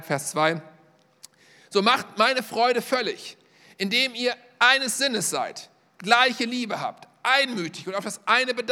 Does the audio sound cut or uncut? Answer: uncut